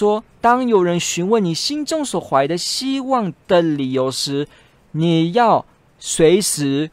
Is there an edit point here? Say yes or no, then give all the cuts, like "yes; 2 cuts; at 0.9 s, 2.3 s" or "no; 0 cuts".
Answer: no; 0 cuts